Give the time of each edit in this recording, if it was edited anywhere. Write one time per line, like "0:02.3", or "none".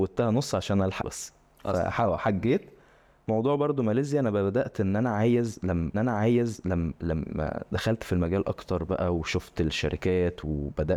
0:01.0
0:05.9